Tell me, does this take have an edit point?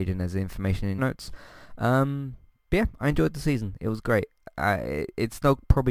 yes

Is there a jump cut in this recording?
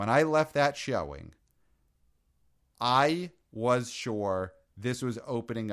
no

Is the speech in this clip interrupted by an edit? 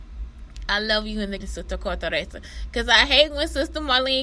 yes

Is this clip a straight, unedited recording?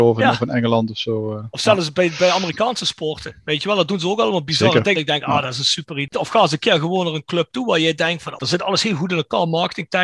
no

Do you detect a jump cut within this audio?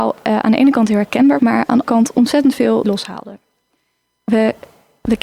yes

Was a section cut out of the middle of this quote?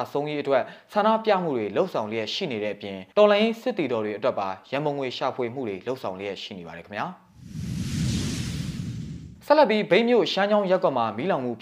yes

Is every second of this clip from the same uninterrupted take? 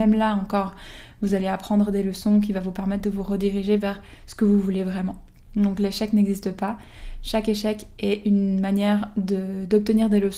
yes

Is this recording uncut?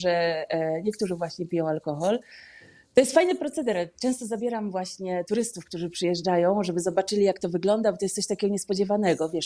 yes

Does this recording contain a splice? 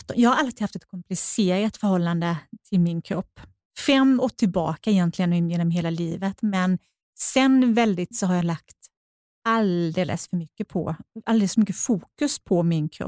yes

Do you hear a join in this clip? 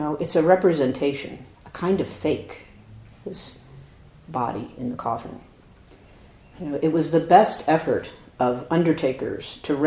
yes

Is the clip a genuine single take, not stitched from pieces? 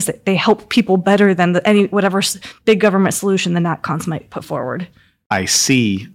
yes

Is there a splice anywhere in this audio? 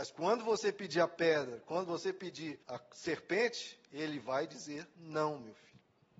yes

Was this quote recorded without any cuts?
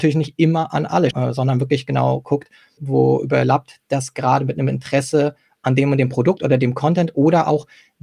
no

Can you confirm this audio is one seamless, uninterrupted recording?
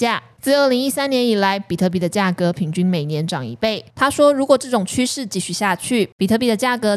no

